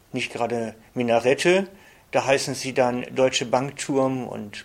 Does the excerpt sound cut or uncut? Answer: uncut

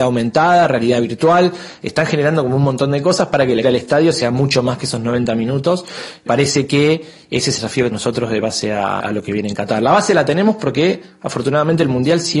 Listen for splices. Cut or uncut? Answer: cut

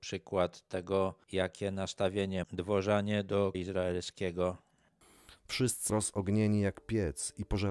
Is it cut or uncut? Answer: cut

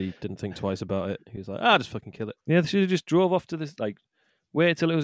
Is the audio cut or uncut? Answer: cut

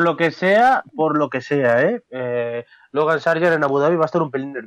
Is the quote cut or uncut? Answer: uncut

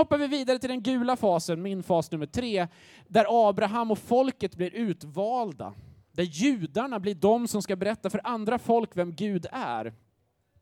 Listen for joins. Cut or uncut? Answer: uncut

